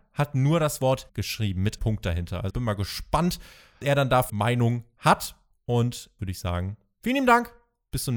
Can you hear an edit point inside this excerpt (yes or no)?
yes